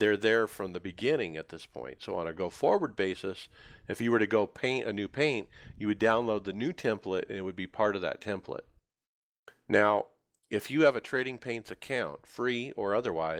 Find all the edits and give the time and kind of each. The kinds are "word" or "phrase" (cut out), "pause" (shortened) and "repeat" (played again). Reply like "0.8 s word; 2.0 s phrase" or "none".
none